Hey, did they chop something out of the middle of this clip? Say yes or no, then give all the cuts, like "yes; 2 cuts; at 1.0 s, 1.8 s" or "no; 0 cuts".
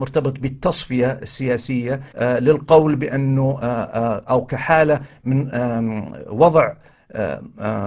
yes; 1 cut; at 2.1 s